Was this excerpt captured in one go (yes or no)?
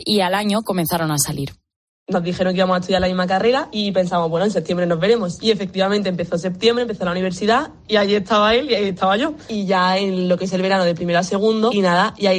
yes